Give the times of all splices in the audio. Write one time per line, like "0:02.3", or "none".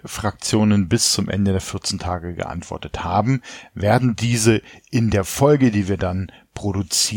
none